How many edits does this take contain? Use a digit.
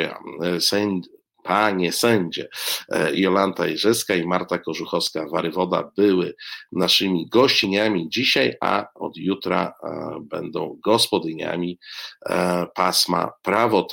0